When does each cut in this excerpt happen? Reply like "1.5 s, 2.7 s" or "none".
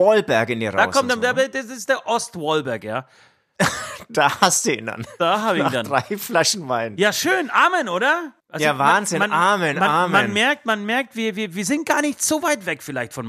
8.4 s

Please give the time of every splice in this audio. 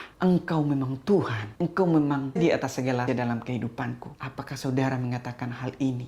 2.4 s, 3.1 s

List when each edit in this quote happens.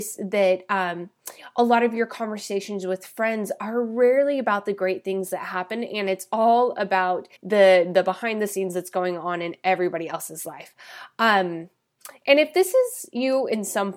7.4 s

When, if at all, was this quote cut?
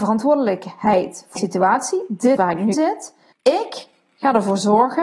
1.4 s, 2.4 s, 2.7 s, 3.3 s

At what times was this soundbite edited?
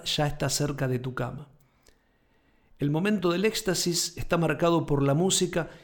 none

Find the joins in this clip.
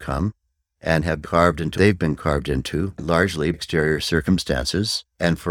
1.2 s, 1.7 s, 3.5 s

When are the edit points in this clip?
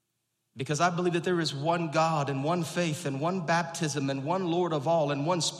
none

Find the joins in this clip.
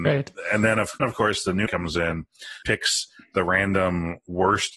1.0 s, 1.7 s, 2.6 s

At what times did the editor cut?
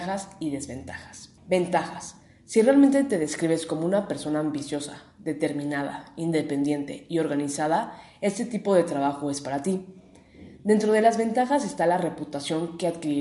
1.4 s

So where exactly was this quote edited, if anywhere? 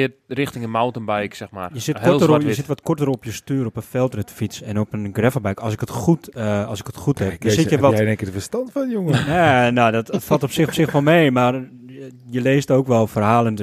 10.7 s

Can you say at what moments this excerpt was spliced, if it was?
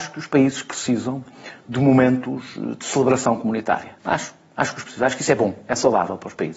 4.0 s, 4.8 s

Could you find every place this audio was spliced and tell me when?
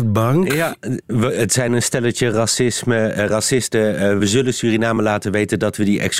none

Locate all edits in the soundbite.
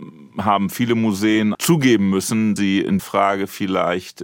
1.5 s, 2.6 s, 3.0 s

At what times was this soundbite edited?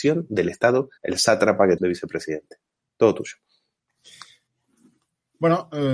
1.0 s, 1.8 s

